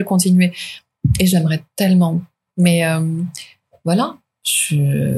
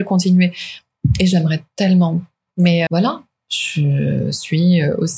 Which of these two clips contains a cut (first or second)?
second